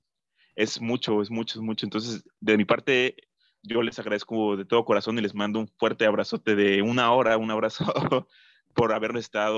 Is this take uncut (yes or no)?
yes